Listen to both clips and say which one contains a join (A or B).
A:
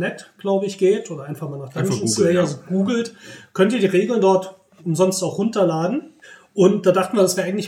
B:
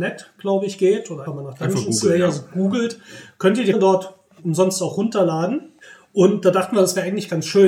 B